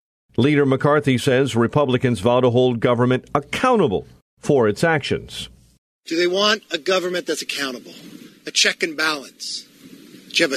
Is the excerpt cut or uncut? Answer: uncut